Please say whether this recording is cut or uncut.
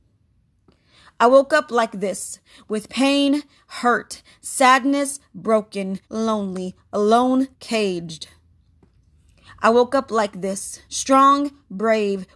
cut